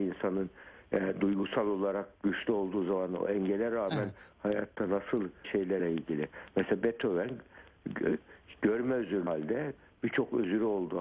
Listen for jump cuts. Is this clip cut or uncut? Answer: cut